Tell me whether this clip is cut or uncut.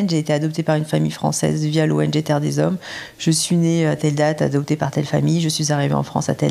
uncut